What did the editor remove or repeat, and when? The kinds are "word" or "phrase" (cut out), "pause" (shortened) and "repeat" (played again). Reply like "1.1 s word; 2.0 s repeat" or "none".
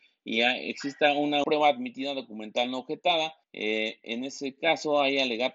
1.4 s word; 3.4 s pause